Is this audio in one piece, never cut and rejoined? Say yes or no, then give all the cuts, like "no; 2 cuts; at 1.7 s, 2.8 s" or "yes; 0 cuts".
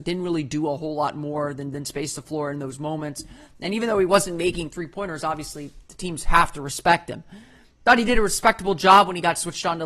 yes; 0 cuts